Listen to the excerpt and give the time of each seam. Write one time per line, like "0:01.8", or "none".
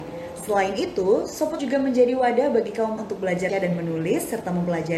0:01.6
0:03.0
0:03.5